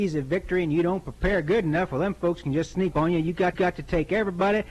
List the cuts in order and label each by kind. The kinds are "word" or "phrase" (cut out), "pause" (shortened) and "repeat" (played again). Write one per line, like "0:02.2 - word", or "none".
0:02.9 - word
0:03.5 - repeat